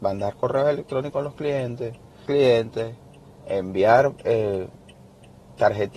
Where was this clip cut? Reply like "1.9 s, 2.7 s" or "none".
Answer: 2.3 s

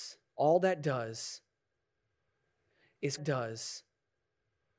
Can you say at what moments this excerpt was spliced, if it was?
3.2 s

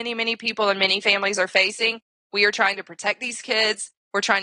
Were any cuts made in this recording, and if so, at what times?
none

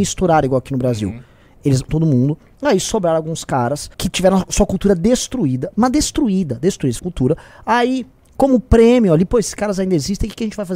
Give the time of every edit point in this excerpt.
1.9 s, 3.9 s, 7.0 s

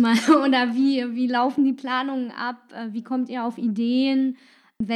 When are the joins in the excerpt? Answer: none

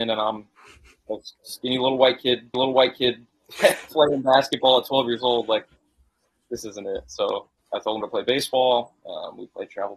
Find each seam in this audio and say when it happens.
2.5 s, 7.6 s, 8.0 s

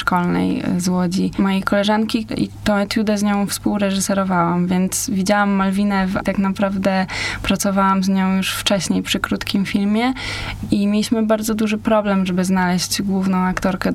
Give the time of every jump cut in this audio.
6.2 s

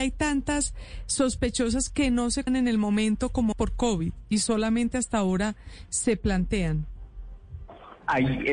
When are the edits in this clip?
2.5 s, 3.5 s

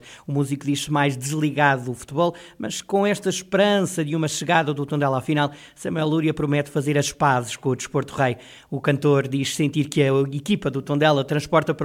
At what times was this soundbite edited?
none

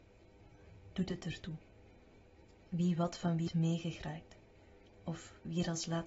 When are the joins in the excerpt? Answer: 3.5 s

